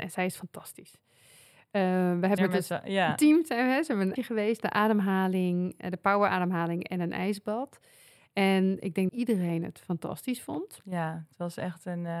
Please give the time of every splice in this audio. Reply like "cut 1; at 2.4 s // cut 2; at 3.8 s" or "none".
cut 1; at 2.4 s // cut 2; at 4.2 s // cut 3; at 9.1 s